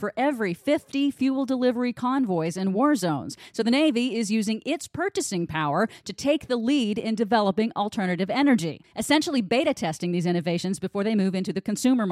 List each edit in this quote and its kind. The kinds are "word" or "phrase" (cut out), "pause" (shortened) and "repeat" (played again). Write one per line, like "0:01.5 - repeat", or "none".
none